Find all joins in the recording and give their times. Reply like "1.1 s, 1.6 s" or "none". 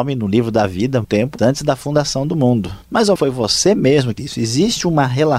1.0 s, 1.4 s, 2.8 s, 3.2 s, 4.2 s